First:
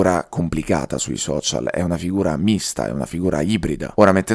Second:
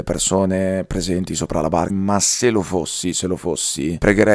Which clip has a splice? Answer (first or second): second